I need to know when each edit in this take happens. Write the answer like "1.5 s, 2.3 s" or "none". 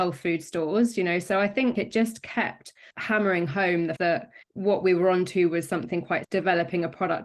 1.7 s, 2.9 s, 4.0 s, 4.4 s, 6.2 s